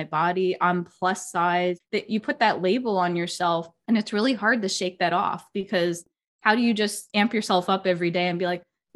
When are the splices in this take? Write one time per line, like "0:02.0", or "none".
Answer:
none